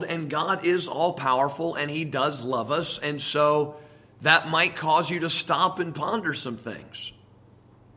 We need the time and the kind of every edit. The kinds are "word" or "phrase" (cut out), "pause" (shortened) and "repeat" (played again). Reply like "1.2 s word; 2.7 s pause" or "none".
none